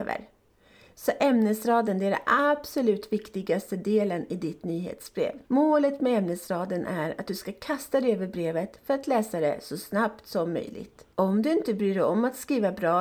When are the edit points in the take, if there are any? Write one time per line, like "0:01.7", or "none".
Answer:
0:05.4
0:11.1

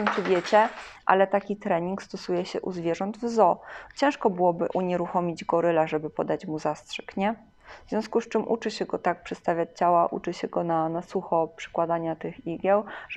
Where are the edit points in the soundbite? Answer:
none

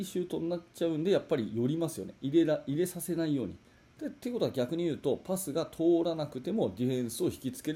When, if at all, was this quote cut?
none

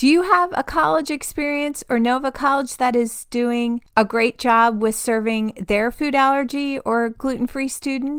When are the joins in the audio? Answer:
none

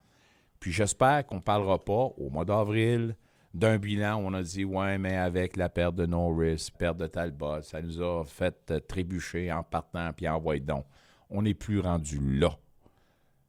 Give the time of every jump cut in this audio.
0:06.7

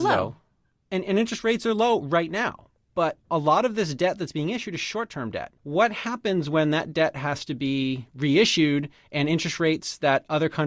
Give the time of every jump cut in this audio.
0:05.6

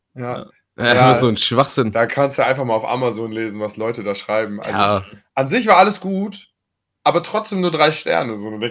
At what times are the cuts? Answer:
none

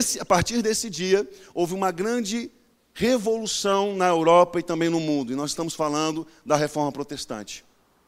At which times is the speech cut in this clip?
none

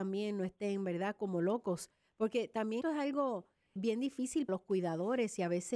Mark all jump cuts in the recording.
0:02.8
0:03.8
0:04.5

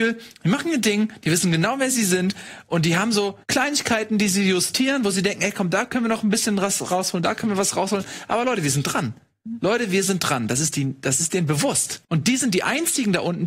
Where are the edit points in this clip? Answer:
0:03.4
0:12.0

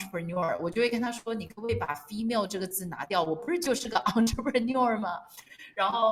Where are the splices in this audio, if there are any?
none

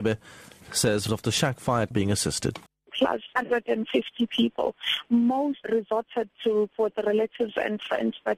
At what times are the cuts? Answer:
0:01.1
0:01.9
0:02.7
0:05.6
0:06.7

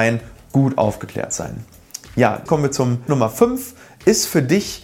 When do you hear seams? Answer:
0:02.5
0:03.1

